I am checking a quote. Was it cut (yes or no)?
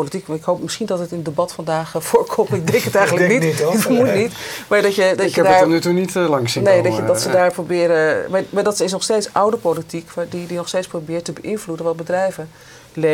no